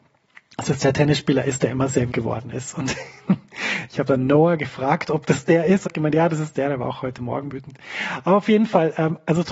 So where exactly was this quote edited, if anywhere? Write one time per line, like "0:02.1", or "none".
0:02.1
0:05.9
0:07.5